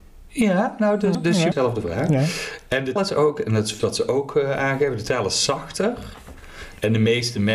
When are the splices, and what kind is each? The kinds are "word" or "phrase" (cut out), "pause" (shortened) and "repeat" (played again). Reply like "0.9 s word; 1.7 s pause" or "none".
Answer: 1.1 s word; 1.5 s word; 3.0 s word; 3.8 s word